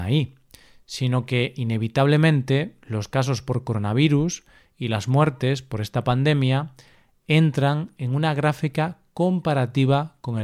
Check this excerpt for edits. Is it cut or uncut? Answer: uncut